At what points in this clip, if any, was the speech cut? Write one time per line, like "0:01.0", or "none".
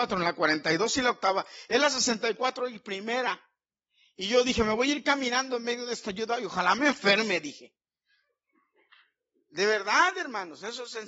none